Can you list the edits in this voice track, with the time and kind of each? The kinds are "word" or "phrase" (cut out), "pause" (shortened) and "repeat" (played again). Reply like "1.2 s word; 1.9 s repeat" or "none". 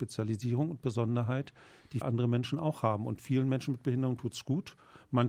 2.0 s word